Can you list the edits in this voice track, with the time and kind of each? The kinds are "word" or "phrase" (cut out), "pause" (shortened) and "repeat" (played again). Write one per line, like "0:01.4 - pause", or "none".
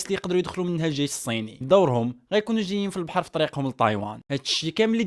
0:01.6 - word